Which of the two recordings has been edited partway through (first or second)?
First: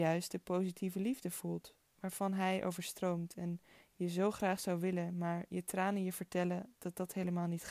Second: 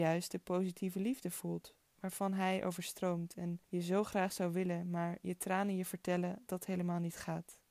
second